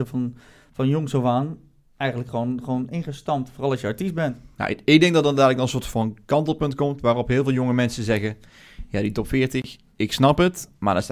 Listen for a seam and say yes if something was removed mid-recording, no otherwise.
no